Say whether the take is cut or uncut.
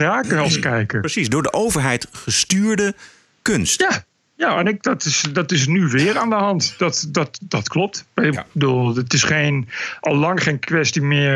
uncut